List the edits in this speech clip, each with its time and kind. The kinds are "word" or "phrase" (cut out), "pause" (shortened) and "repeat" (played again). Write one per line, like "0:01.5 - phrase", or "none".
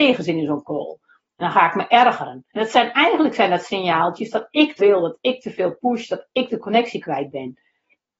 0:02.5 - pause
0:04.8 - word